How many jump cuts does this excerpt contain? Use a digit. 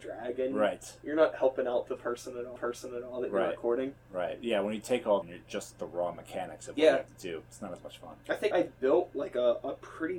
3